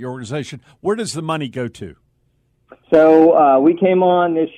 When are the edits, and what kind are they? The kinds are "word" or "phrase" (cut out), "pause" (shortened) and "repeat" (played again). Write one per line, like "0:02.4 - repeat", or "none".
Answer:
0:02.8 - pause